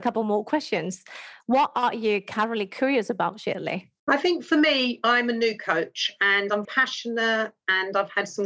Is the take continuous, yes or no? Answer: no